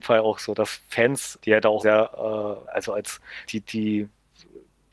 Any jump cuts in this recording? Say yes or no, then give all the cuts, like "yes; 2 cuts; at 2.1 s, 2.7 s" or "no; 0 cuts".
yes; 4 cuts; at 1.4 s, 1.8 s, 2.6 s, 3.5 s